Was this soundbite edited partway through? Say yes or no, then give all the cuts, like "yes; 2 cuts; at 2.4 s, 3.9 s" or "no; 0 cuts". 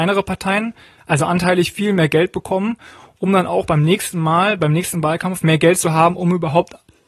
no; 0 cuts